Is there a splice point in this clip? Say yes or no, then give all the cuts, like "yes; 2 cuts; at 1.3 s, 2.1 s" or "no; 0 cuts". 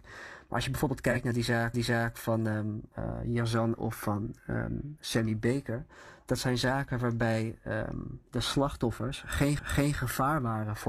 yes; 3 cuts; at 1.7 s, 3.7 s, 9.6 s